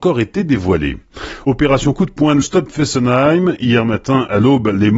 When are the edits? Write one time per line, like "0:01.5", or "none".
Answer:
0:02.4